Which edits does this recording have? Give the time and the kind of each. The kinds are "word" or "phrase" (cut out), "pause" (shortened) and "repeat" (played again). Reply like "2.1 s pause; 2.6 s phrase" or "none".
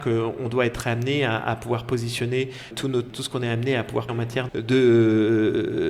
2.7 s word; 3.1 s word; 4.1 s word; 4.5 s word